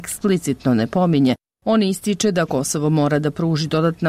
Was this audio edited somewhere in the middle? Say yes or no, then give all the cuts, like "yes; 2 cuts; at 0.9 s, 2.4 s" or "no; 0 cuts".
no; 0 cuts